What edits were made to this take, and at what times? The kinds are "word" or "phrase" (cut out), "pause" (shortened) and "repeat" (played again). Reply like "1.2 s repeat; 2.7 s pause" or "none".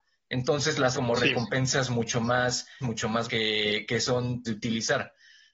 0.9 s word; 2.8 s word; 3.3 s word; 3.9 s word; 4.4 s word

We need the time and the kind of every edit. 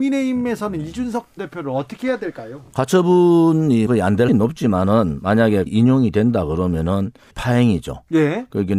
1.4 s word; 3.9 s word; 4.3 s word; 5.7 s word; 7.3 s word

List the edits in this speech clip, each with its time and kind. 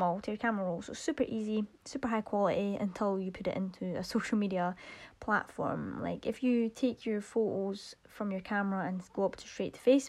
none

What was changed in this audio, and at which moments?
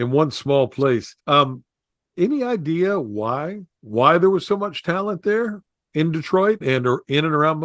1.2 s pause; 6.6 s word

